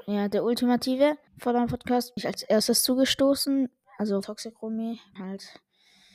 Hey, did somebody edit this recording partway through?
yes; 4 cuts; at 1.3 s, 2.2 s, 4.2 s, 5.2 s

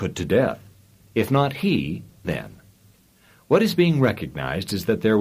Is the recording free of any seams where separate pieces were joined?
no; 1 cut; at 2.2 s

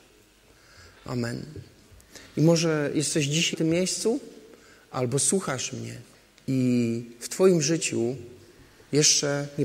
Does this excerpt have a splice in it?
yes; 2 cuts; at 3.5 s, 6.1 s

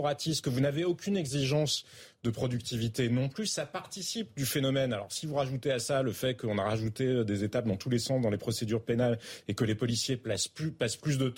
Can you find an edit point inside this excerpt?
no; 0 cuts

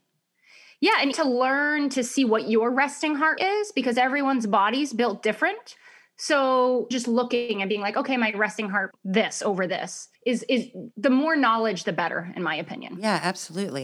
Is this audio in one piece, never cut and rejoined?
no; 6 cuts; at 1.1 s, 3.4 s, 6.9 s, 8.9 s, 10.1 s, 10.9 s

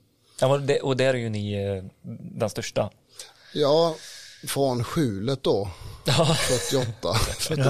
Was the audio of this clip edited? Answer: no; 0 cuts

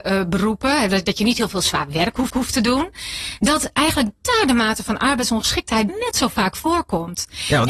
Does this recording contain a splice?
yes; 2 cuts; at 2.3 s, 5.9 s

